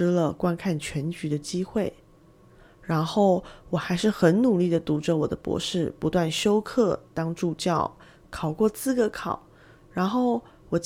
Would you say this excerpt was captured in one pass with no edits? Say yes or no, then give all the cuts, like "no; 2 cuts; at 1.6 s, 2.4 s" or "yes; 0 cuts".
yes; 0 cuts